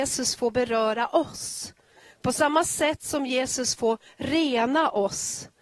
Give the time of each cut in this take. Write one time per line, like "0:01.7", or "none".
none